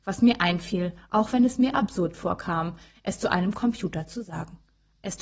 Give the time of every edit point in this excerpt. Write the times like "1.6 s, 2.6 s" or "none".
none